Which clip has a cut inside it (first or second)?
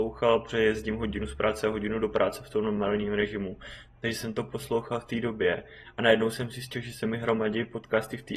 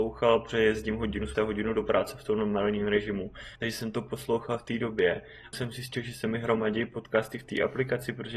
second